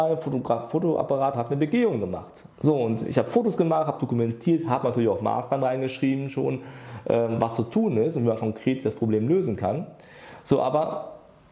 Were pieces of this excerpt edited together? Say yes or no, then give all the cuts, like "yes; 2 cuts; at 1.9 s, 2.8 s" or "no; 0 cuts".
yes; 2 cuts; at 1.3 s, 2.5 s